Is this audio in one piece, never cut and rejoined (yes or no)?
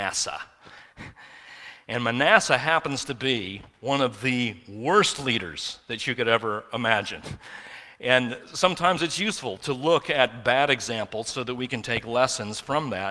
yes